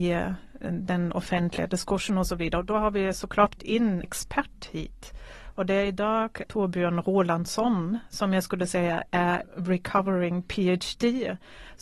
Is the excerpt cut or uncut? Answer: cut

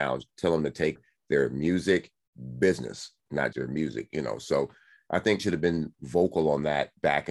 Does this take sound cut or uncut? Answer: cut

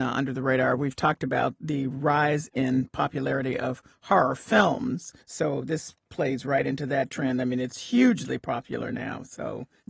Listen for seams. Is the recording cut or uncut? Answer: cut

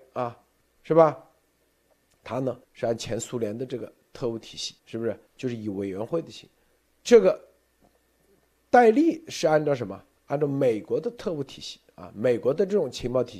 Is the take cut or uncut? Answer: cut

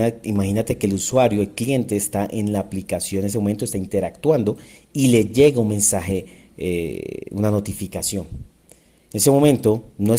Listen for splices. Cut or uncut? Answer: uncut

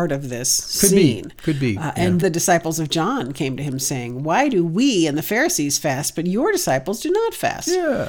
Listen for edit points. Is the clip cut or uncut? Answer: cut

